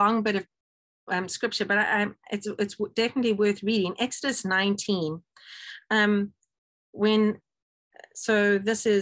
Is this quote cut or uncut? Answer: uncut